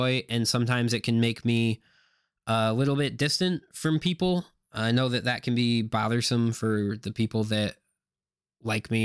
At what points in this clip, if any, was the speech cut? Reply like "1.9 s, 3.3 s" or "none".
none

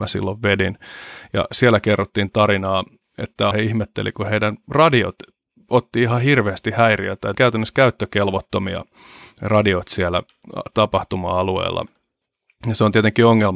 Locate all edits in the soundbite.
2.3 s, 3.5 s, 7.3 s

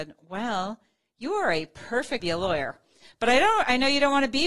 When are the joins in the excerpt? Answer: 2.2 s

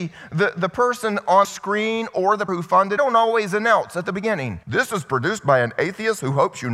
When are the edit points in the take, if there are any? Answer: 1.4 s, 2.5 s, 3.0 s, 4.6 s

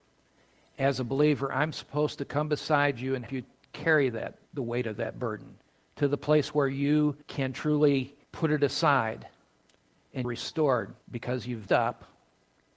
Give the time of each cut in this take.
3.3 s, 4.5 s, 5.6 s, 7.2 s, 8.2 s, 10.2 s, 11.0 s, 11.7 s

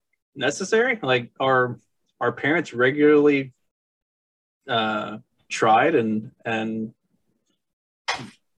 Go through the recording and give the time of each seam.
none

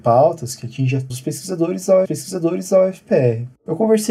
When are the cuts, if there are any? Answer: 1.1 s, 2.0 s

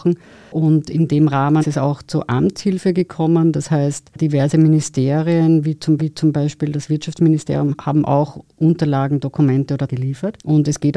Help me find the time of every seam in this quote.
1.6 s, 6.0 s, 9.9 s

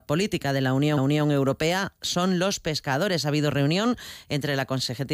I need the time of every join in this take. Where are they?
1.0 s

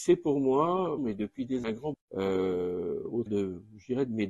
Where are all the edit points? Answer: 1.0 s, 1.6 s, 1.9 s, 3.3 s

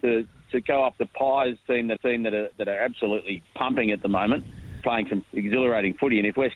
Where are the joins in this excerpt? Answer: 0.9 s, 2.0 s, 3.5 s, 4.8 s, 5.2 s

